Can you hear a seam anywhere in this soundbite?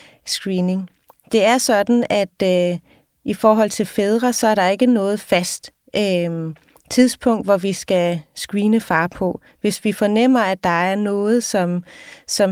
no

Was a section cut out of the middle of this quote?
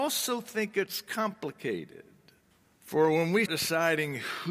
yes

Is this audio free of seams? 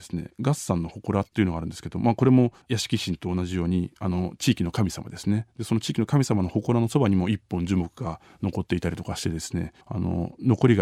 no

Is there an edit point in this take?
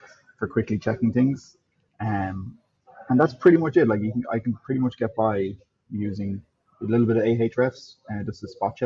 no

